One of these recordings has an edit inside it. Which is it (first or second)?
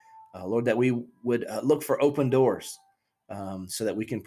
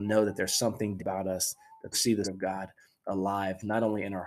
second